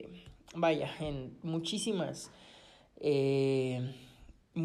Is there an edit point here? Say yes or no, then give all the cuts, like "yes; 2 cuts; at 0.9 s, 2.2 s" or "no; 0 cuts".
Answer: no; 0 cuts